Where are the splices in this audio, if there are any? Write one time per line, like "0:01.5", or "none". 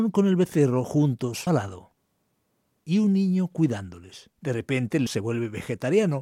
0:01.5
0:04.4
0:05.1